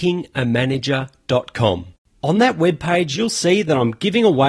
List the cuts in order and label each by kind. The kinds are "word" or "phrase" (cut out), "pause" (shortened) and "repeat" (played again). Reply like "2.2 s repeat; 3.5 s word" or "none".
none